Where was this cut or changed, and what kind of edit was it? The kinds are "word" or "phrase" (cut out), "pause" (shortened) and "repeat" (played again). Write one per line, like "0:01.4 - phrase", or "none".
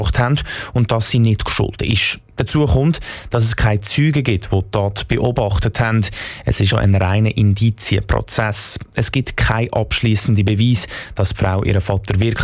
0:06.7 - word